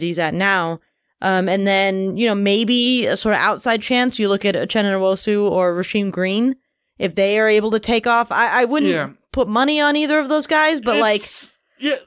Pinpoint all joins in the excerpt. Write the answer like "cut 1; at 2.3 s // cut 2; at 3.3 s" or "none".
none